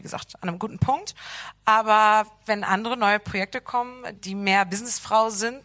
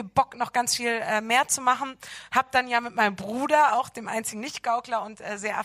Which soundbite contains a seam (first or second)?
first